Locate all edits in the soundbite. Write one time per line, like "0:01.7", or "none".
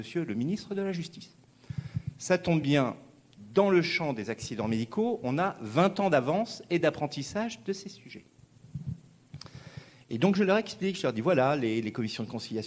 none